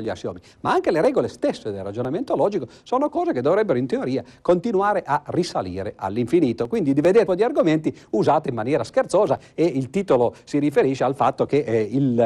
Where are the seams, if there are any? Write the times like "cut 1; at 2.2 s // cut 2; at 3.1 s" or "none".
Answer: cut 1; at 7.3 s